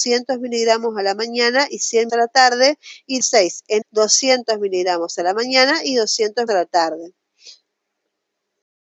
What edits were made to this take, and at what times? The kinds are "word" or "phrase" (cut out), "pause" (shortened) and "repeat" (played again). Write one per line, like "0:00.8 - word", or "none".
0:02.1 - word
0:03.2 - word
0:03.8 - word
0:06.5 - word